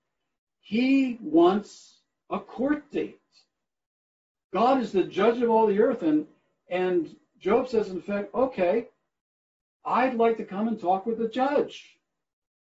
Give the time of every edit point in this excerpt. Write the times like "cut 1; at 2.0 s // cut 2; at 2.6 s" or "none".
none